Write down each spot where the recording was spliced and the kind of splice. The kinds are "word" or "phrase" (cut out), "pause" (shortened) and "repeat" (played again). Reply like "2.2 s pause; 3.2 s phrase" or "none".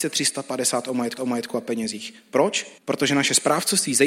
1.2 s repeat; 2.8 s pause